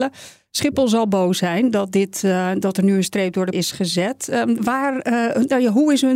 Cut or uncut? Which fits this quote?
cut